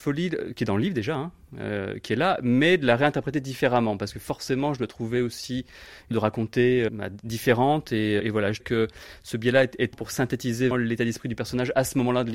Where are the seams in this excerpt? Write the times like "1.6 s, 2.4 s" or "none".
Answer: 6.1 s, 6.9 s, 8.2 s, 8.6 s, 9.9 s, 10.7 s